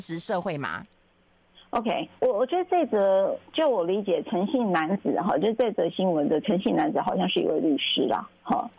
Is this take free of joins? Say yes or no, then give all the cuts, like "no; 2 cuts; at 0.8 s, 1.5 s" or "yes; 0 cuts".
no; 2 cuts; at 2.2 s, 3.5 s